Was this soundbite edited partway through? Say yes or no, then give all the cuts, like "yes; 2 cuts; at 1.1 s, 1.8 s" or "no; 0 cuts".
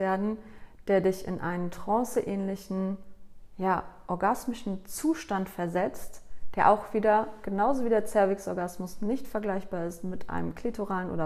no; 0 cuts